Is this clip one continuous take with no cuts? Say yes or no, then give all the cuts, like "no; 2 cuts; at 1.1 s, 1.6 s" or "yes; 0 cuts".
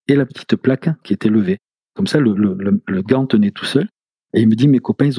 yes; 0 cuts